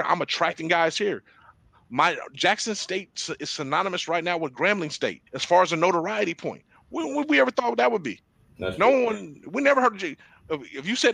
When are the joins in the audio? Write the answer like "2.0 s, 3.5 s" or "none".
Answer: 5.3 s